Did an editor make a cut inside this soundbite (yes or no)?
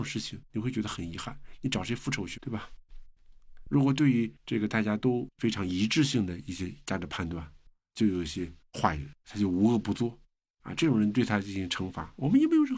yes